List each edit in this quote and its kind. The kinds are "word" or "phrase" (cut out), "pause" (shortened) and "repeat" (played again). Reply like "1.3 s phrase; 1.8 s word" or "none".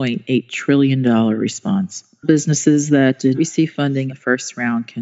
2.2 s word; 3.3 s word; 4.1 s word